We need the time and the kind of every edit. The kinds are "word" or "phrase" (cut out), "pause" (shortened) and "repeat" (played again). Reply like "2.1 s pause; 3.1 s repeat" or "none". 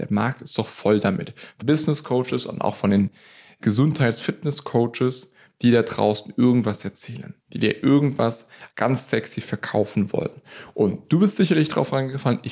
1.6 s word; 7.4 s pause; 8.7 s pause

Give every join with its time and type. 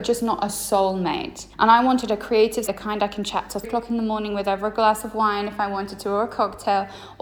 1.5 s pause; 2.7 s word; 3.6 s word

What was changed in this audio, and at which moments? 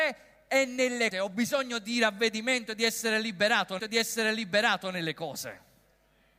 1.1 s word; 3.8 s repeat

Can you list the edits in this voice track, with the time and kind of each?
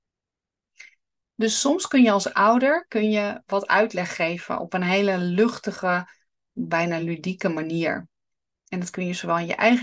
none

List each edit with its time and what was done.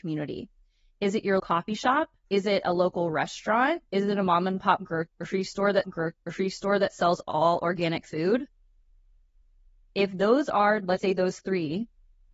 1.4 s word; 2.2 s pause; 3.9 s pause; 5.8 s repeat; 11.0 s word

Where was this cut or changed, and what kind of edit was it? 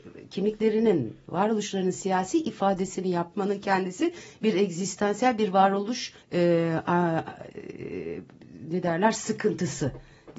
6.2 s pause

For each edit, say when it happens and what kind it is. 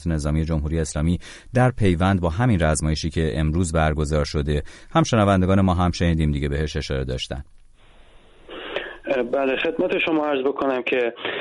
none

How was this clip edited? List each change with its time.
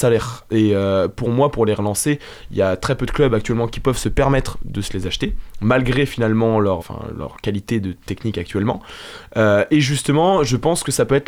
6.8 s word

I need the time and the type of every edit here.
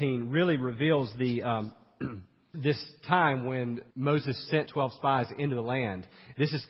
2.5 s word; 3.9 s pause; 4.7 s word

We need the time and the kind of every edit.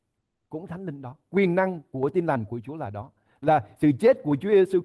none

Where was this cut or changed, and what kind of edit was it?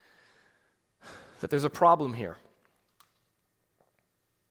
none

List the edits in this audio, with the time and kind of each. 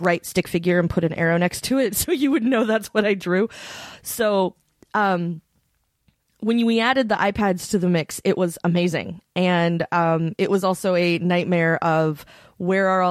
none

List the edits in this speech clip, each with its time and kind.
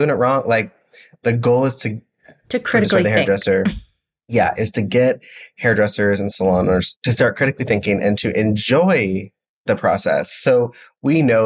none

